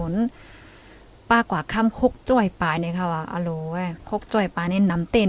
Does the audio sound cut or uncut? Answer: cut